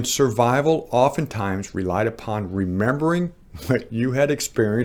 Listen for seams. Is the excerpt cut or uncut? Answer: uncut